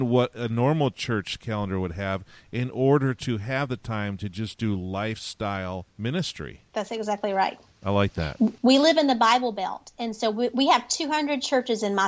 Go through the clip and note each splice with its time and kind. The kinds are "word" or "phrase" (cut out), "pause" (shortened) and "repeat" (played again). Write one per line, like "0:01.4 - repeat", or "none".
0:05.9 - pause

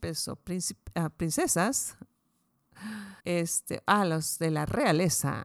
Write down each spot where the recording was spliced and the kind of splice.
0:03.2 - pause

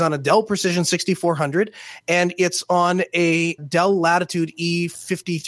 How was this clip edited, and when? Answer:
0:03.6 - word

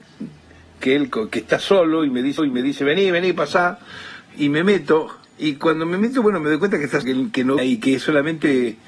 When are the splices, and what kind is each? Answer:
0:02.4 - repeat
0:05.3 - pause
0:07.0 - word
0:07.6 - word

